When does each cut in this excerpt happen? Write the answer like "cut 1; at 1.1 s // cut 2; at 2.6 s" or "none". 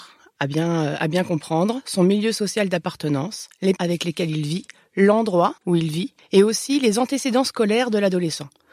cut 1; at 3.8 s // cut 2; at 5.6 s // cut 3; at 6.2 s